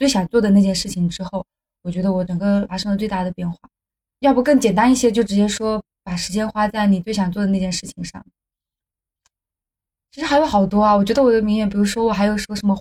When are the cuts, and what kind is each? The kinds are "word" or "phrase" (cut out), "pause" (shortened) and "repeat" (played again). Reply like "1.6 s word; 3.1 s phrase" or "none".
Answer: none

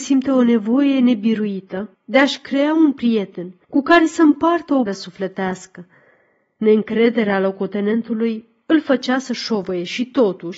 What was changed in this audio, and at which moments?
1.9 s pause; 3.6 s pause; 4.9 s word

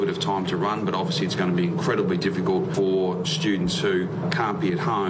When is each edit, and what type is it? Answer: none

